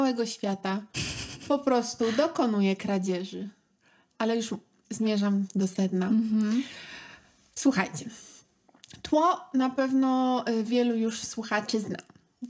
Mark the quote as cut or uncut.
uncut